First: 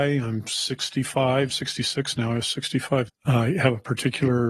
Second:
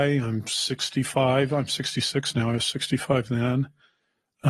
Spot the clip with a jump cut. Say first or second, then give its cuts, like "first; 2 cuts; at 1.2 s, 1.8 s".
first; 2 cuts; at 1.5 s, 3.1 s